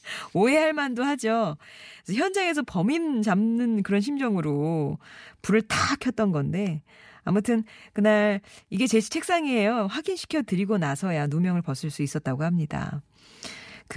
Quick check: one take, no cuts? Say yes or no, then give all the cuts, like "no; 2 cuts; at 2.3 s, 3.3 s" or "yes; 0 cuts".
yes; 0 cuts